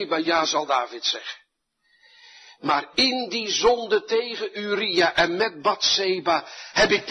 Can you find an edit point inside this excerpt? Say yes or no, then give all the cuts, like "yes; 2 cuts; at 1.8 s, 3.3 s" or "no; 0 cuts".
no; 0 cuts